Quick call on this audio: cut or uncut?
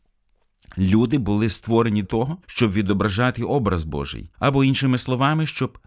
cut